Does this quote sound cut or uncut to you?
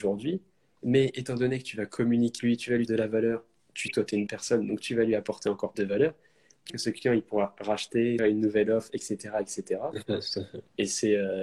cut